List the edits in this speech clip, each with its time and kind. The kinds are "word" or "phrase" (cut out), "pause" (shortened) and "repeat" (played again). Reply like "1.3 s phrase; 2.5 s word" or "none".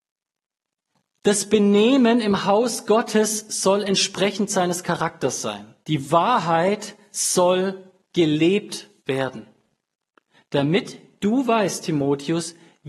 5.8 s pause; 9.0 s pause